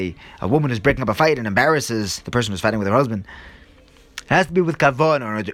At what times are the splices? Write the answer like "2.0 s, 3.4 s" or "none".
none

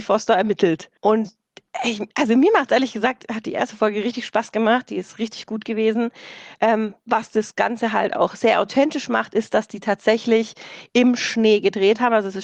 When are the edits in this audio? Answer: 1.0 s

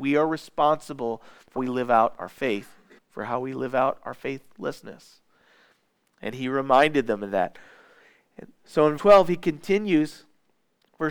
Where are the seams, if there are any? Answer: 1.6 s, 3.0 s, 9.0 s

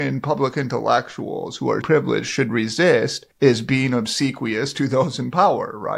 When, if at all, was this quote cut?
1.8 s, 3.3 s

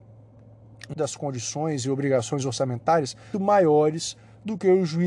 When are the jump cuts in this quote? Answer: 0.9 s, 3.3 s

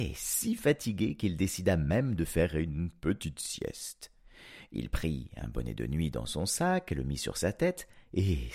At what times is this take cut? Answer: none

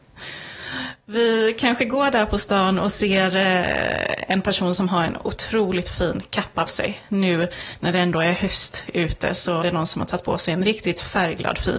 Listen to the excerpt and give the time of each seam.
6.7 s, 9.6 s

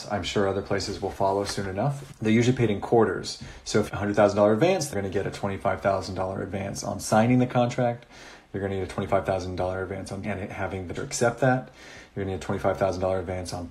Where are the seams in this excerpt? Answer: 3.9 s, 4.9 s, 10.2 s, 10.9 s

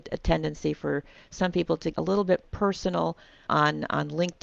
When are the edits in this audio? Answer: 1.9 s, 2.4 s

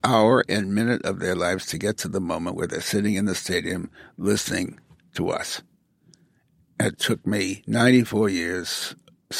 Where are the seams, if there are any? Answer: none

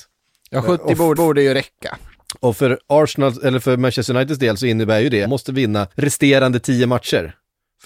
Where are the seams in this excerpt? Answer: 1.2 s, 5.2 s, 5.9 s

